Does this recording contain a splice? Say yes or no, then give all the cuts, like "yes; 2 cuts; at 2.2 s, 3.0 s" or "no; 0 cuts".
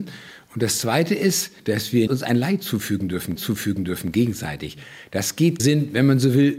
yes; 4 cuts; at 1.6 s, 2.1 s, 3.4 s, 5.6 s